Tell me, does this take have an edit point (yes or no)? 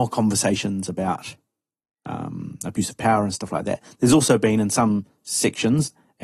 no